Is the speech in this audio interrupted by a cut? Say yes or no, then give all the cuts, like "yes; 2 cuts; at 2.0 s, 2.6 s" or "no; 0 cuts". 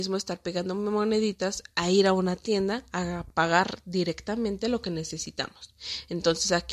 no; 0 cuts